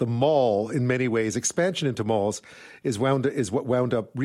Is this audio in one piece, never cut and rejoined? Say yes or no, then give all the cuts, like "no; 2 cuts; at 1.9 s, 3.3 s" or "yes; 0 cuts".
yes; 0 cuts